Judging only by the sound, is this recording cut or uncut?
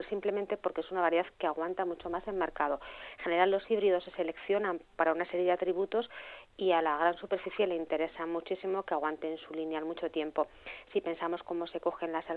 uncut